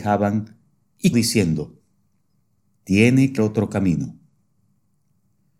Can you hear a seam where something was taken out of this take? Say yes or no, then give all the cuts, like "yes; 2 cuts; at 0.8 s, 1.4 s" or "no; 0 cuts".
yes; 2 cuts; at 1.1 s, 3.4 s